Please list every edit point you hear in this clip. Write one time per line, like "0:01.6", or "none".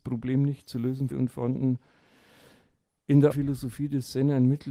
0:01.1
0:03.3